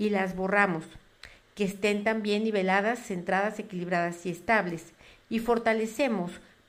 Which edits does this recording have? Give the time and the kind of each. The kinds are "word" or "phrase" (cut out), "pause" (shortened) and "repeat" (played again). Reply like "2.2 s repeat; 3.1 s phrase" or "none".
none